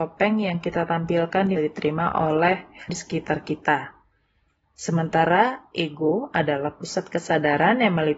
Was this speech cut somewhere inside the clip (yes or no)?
yes